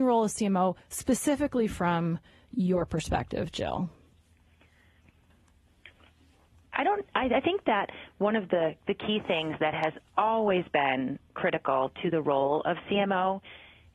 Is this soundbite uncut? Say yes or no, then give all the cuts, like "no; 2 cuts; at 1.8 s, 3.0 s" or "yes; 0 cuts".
yes; 0 cuts